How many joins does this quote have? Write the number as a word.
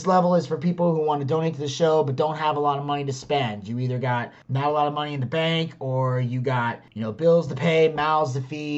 zero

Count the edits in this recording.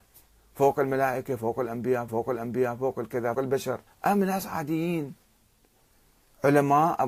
three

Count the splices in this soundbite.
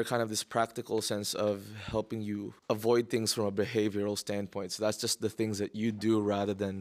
one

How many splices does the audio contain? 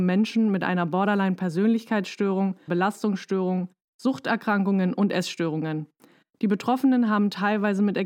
one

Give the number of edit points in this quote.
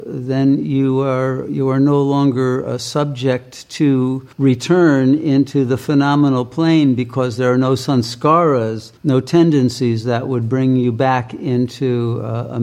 two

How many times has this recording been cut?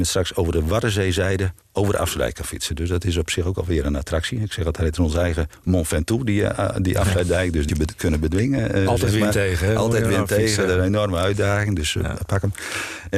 two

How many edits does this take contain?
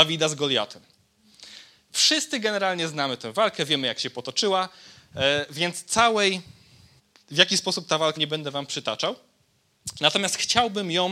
two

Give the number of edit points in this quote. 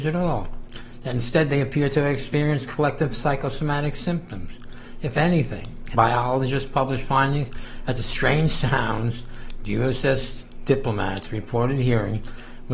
one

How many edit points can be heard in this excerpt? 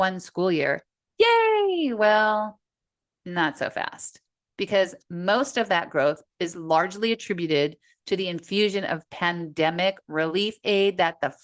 zero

